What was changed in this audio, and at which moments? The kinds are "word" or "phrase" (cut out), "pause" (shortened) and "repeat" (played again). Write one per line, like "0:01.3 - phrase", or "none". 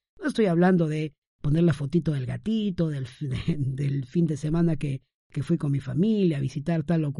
none